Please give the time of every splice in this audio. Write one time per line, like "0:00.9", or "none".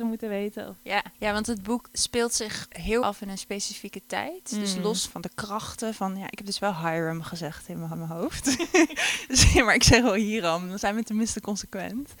0:01.1
0:03.0
0:07.9